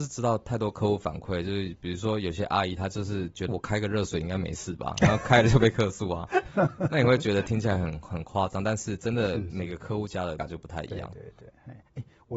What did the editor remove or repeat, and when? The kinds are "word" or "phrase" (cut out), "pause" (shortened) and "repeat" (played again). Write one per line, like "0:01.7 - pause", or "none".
0:03.5 - phrase
0:10.4 - word